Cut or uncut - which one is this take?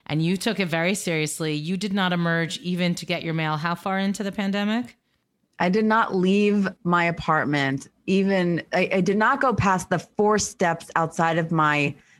cut